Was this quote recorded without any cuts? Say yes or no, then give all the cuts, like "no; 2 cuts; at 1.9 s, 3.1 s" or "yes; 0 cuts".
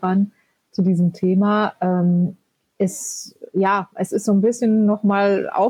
yes; 0 cuts